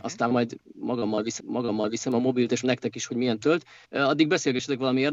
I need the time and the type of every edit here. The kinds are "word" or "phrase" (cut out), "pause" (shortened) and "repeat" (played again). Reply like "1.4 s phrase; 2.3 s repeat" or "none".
1.4 s repeat; 2.6 s word; 3.4 s word; 3.8 s pause